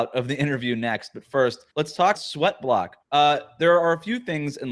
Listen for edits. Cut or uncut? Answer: cut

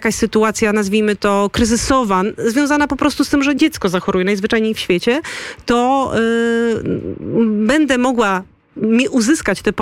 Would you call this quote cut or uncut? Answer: uncut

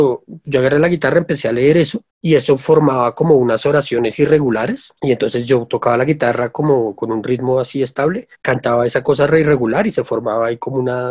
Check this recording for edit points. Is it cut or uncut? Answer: cut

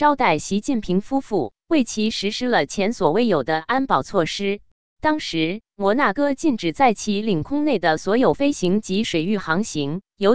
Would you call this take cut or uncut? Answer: cut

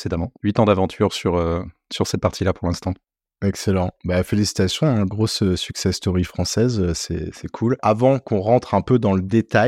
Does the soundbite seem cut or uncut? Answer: uncut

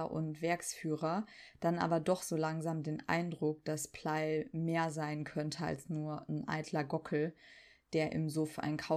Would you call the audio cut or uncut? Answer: uncut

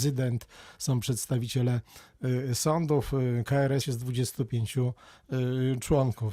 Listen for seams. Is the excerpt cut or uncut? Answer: cut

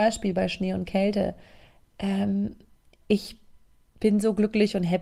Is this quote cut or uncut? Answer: cut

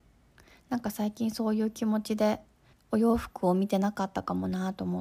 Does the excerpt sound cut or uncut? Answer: cut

